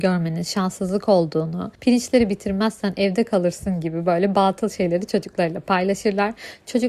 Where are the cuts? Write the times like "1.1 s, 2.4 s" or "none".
1.7 s